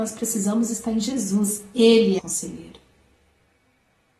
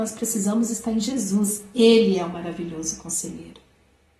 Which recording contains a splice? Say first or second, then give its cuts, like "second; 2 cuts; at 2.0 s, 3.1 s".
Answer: first; 1 cut; at 2.2 s